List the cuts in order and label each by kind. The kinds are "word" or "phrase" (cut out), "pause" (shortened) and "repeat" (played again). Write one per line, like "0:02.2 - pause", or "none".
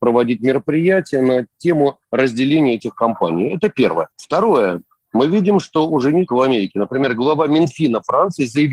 0:04.1 - pause
0:06.3 - word